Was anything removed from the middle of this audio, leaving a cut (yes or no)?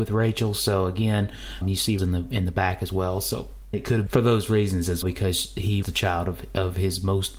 yes